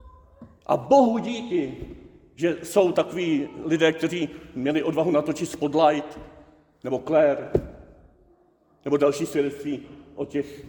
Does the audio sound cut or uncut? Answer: uncut